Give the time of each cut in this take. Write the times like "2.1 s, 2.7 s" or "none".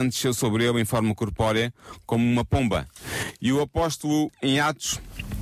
4.3 s